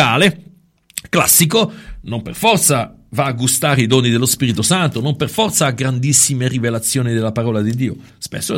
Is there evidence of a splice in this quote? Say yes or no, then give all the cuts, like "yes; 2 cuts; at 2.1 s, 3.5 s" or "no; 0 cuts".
no; 0 cuts